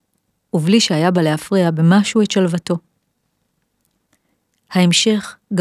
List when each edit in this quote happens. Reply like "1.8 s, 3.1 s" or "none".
none